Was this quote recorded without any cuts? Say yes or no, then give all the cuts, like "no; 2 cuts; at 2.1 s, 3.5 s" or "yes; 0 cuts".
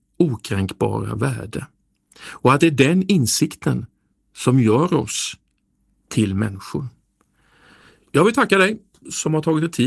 yes; 0 cuts